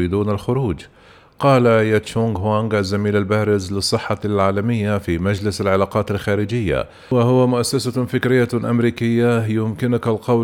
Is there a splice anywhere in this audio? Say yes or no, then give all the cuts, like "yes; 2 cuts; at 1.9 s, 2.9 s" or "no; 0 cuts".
no; 0 cuts